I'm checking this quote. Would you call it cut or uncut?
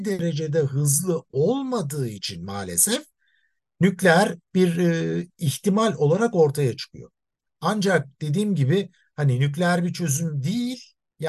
uncut